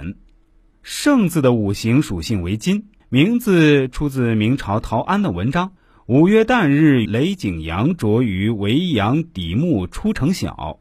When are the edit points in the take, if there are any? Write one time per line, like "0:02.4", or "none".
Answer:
0:03.0
0:05.8
0:07.1